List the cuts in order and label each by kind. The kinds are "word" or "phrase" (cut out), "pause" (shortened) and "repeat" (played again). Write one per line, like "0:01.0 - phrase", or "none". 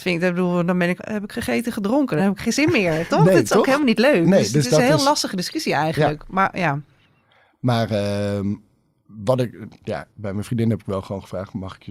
0:01.0 - word
0:02.2 - word
0:10.1 - pause